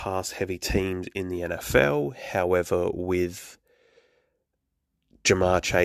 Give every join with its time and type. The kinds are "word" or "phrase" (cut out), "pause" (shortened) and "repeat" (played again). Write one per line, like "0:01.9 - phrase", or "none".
none